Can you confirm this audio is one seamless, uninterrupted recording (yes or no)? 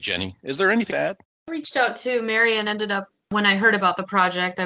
no